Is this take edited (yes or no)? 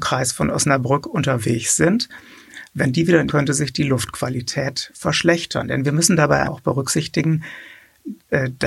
yes